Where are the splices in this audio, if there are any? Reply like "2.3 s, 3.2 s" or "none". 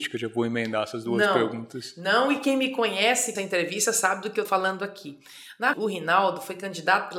3.4 s, 4.5 s, 5.7 s